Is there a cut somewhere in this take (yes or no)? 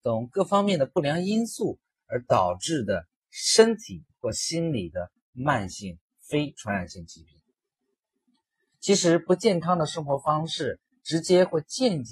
no